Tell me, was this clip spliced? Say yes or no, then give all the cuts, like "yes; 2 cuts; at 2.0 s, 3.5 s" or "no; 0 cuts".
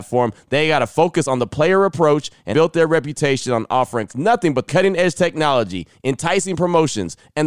yes; 3 cuts; at 2.5 s, 4.1 s, 4.7 s